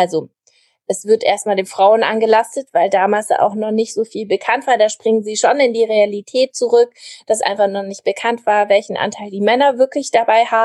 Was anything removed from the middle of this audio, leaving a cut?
no; 0 cuts

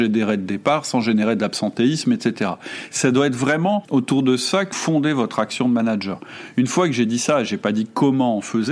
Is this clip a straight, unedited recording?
no; 2 cuts; at 3.8 s, 4.7 s

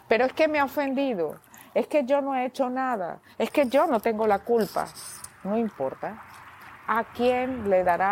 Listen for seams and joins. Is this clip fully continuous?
yes; 0 cuts

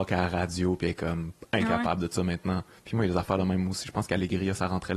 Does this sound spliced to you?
no; 0 cuts

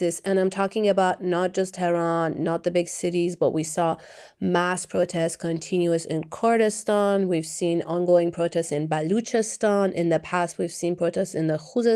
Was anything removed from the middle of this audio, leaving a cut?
no; 0 cuts

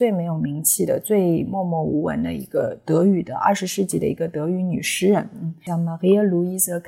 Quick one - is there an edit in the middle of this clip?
no; 0 cuts

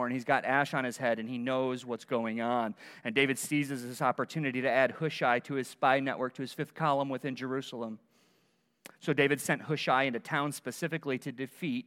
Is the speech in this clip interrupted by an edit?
no; 0 cuts

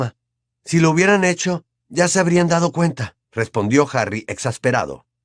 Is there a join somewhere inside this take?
yes; 1 cut; at 3.2 s

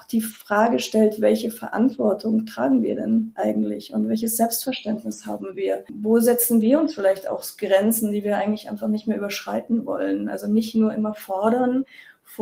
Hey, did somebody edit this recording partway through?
no; 0 cuts

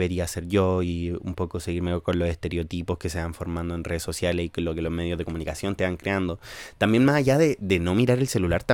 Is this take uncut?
yes; 0 cuts

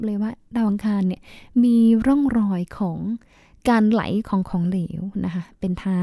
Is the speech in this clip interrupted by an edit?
no; 0 cuts

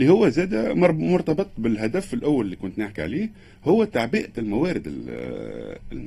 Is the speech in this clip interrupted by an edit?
no; 0 cuts

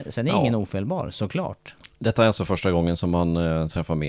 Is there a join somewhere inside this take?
no; 0 cuts

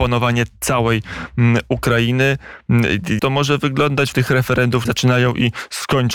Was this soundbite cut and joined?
yes; 3 cuts; at 3.2 s, 4.1 s, 4.9 s

